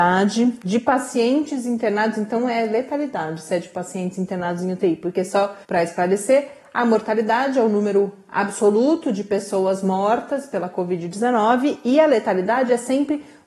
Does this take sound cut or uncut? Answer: cut